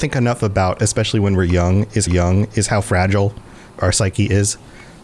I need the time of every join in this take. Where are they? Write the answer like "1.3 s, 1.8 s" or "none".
2.1 s, 3.7 s